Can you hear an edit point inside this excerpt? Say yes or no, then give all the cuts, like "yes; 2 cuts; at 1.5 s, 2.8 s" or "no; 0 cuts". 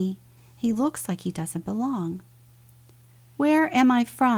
no; 0 cuts